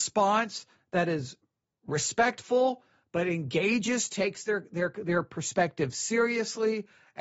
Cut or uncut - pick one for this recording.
uncut